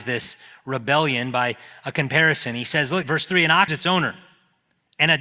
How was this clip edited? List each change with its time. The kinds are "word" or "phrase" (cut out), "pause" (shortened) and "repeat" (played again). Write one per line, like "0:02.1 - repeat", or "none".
0:03.0 - word
0:03.7 - word